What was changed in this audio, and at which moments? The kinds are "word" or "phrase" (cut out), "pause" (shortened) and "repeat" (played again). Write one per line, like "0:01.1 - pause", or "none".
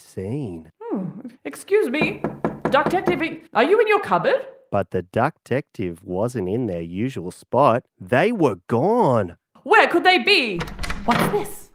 0:01.4 - pause
0:03.5 - pause
0:07.9 - pause